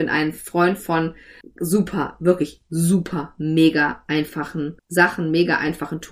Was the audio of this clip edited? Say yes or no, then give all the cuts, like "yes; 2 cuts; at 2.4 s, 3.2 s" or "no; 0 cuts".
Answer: yes; 2 cuts; at 1.4 s, 4.8 s